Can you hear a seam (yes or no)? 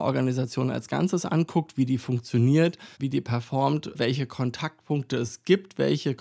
yes